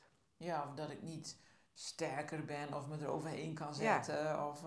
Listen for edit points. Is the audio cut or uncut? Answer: uncut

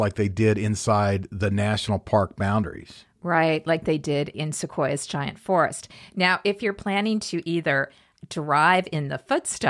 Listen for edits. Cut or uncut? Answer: uncut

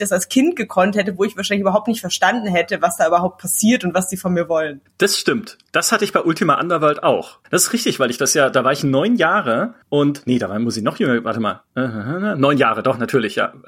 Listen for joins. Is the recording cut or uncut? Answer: cut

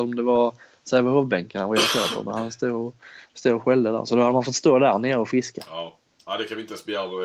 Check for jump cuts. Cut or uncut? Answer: uncut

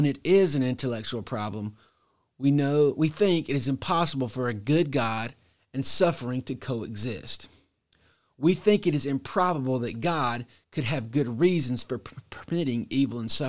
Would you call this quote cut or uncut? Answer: uncut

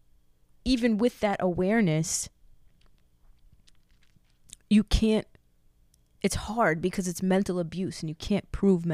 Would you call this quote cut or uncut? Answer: cut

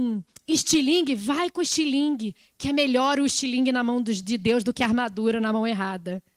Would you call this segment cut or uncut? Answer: uncut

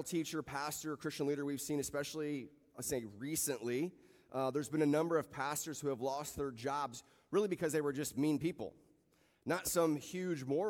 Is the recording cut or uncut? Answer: uncut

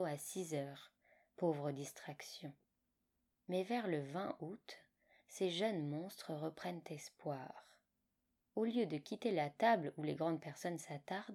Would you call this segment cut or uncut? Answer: uncut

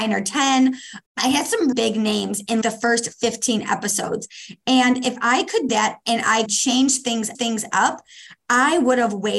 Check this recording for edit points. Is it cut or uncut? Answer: cut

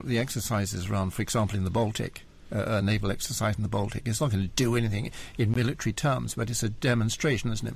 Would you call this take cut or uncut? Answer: uncut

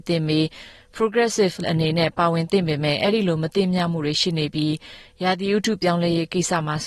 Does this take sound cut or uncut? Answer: cut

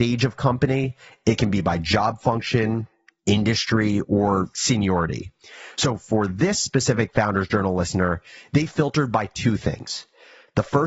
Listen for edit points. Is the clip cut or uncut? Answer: uncut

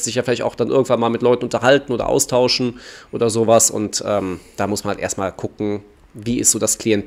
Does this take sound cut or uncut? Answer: uncut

